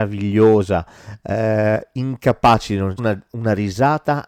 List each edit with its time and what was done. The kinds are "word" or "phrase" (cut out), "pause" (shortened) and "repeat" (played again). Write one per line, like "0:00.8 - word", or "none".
0:03.0 - word